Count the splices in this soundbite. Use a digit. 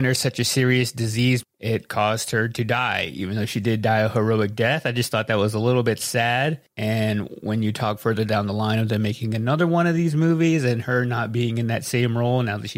0